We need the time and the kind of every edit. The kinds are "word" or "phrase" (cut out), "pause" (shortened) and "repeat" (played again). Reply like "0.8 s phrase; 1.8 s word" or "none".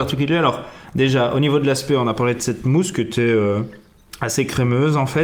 none

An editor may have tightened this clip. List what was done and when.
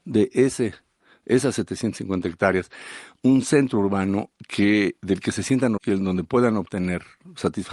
5.8 s word

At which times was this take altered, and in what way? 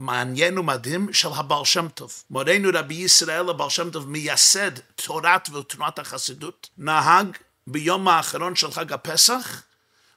2.3 s pause; 6.7 s pause

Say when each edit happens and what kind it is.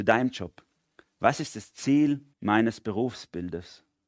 2.3 s pause

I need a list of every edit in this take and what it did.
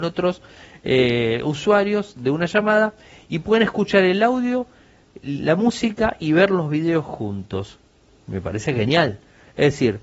none

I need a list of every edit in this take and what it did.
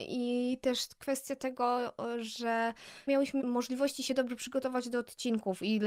3.1 s phrase; 3.4 s word

